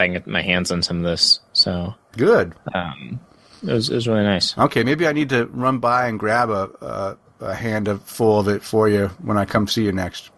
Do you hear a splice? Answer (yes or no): no